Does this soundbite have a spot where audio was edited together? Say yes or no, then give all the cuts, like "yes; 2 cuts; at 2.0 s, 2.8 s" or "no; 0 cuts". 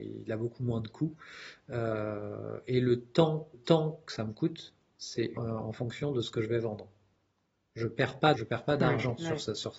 yes; 3 cuts; at 3.5 s, 5.4 s, 8.3 s